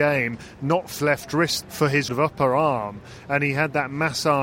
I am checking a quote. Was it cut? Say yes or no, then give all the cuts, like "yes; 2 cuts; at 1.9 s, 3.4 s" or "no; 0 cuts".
yes; 3 cuts; at 1.0 s, 1.6 s, 2.1 s